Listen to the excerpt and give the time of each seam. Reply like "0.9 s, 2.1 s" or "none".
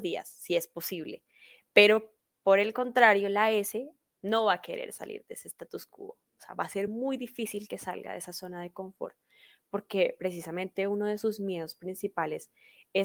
none